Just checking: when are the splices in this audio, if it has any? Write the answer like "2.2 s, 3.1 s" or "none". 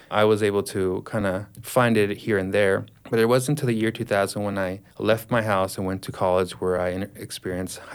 none